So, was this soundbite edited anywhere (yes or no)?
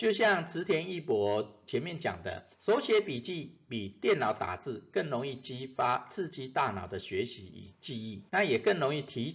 yes